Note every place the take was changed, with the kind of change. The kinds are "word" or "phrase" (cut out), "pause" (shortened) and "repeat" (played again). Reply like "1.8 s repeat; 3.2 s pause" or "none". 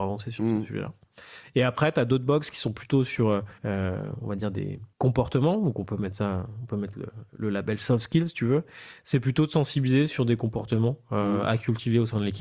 3.6 s pause; 4.9 s pause; 7.3 s pause

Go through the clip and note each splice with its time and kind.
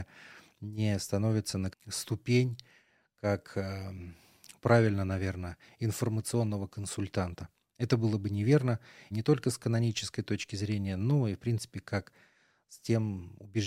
1.7 s word; 9.1 s word

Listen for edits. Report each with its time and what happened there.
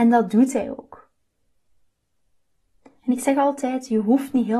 none

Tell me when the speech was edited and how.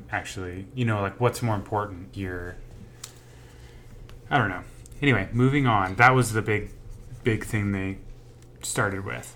2.1 s word

